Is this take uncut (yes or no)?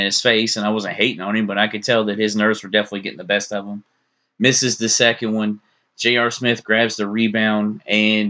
yes